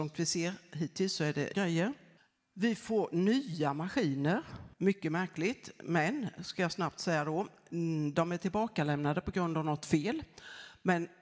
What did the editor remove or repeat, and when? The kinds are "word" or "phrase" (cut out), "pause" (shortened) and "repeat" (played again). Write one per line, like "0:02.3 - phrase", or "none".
0:01.5 - word
0:02.2 - pause
0:04.7 - pause

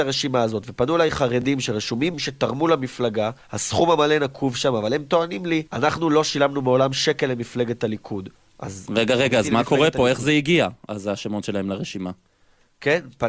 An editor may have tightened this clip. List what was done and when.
0:02.1 - phrase
0:03.4 - pause
0:05.7 - pause
0:08.3 - pause

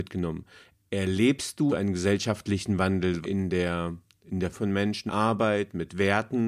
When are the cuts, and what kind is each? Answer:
0:01.7 - word
0:03.2 - word
0:04.5 - word
0:05.1 - word

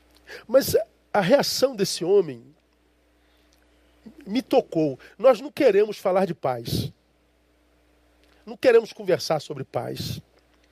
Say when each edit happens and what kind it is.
none

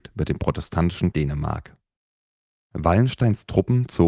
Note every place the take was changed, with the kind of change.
0:01.1 - word

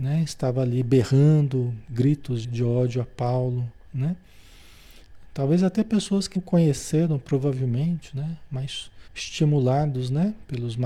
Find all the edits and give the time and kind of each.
0:02.4 - word
0:06.4 - word
0:09.1 - pause

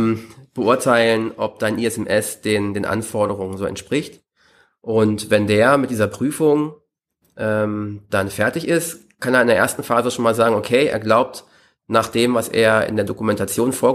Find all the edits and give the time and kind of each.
none

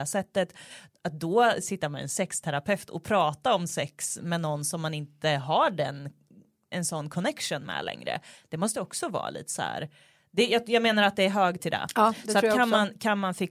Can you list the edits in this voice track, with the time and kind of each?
0:11.6 - word

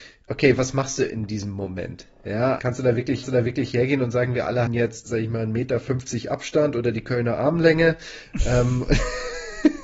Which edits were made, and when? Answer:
0:02.6 - word
0:03.2 - repeat
0:04.7 - word
0:05.0 - word

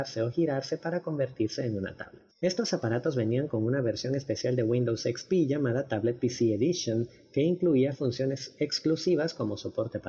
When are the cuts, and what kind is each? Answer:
0:02.3 - pause

